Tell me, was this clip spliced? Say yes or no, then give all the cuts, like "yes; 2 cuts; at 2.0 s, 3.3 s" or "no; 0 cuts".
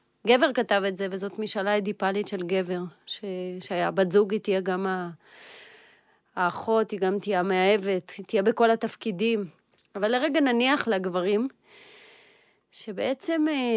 no; 0 cuts